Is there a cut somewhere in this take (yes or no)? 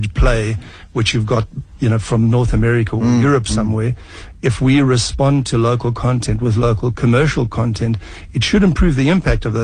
no